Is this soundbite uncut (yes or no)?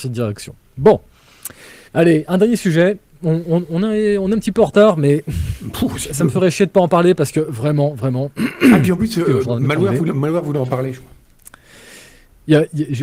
no